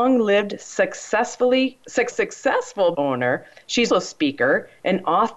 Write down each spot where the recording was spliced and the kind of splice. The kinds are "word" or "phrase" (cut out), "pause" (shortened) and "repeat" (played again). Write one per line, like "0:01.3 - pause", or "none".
0:02.1 - word
0:02.9 - word
0:03.9 - word